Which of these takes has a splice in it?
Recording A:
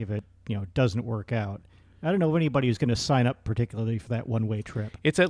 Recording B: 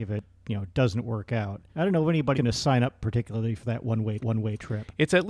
B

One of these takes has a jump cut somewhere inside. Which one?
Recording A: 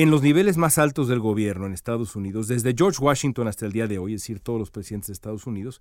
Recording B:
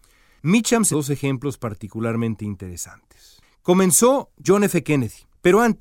B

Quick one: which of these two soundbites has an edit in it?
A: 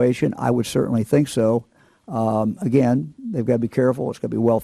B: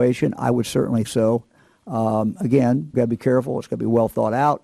B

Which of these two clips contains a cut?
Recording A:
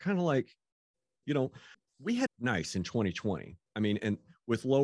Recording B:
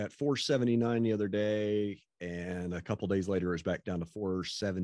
A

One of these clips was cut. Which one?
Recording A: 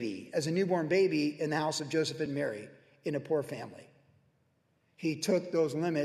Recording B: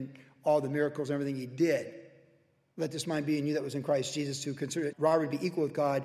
B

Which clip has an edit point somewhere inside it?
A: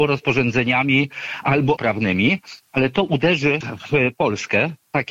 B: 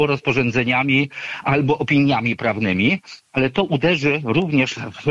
A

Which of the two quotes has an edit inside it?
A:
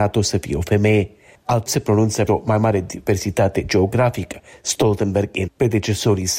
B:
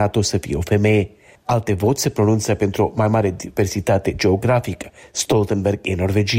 A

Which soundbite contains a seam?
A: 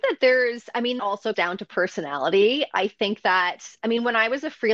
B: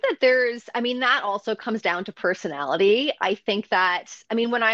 A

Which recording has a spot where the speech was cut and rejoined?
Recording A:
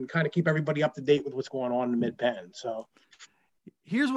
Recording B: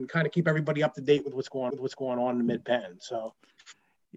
B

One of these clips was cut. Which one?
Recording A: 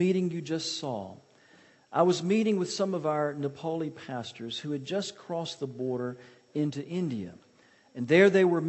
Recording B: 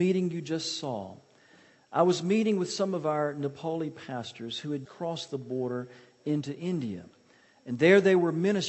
B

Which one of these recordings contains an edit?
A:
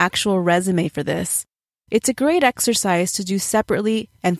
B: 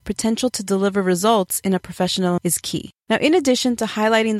B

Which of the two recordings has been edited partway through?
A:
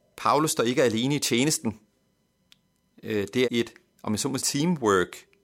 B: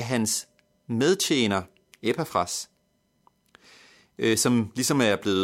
A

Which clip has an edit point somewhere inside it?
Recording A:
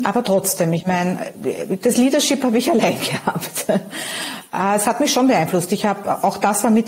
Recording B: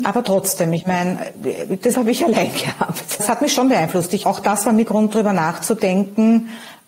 B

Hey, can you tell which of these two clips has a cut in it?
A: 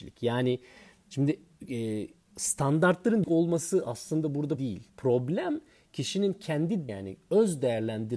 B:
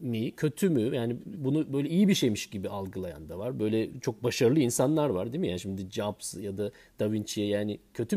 A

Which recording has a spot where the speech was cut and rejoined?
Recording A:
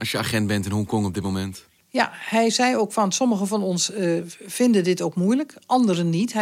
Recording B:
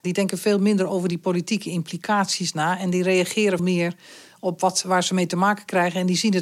B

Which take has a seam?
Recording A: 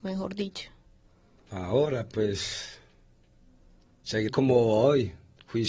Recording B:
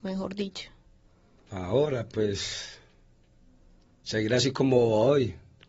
A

